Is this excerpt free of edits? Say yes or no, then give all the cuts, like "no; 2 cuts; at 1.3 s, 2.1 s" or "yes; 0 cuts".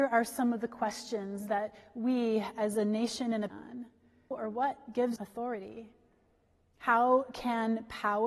no; 3 cuts; at 3.5 s, 4.3 s, 5.2 s